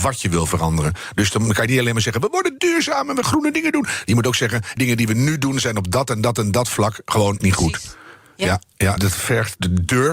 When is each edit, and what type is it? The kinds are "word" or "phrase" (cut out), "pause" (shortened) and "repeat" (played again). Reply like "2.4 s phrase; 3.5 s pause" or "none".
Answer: 3.2 s word; 4.8 s word; 7.4 s word; 9.0 s word